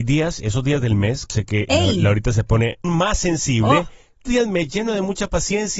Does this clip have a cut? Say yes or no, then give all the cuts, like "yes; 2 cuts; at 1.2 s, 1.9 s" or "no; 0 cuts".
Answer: yes; 3 cuts; at 1.3 s, 2.8 s, 4.3 s